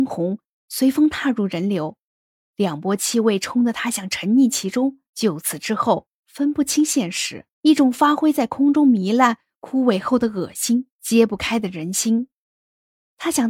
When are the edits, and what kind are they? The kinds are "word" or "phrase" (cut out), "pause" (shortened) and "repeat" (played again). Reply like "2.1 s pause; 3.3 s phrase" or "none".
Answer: 5.1 s pause; 7.5 s pause; 10.9 s pause